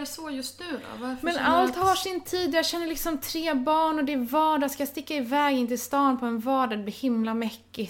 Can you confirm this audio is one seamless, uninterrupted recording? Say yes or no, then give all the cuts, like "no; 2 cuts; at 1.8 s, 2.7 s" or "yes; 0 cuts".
yes; 0 cuts